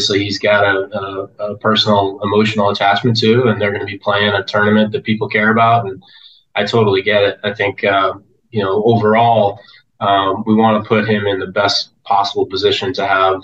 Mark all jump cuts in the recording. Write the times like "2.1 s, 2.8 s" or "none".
none